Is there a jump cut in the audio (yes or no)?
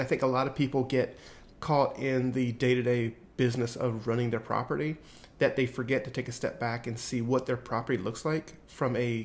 no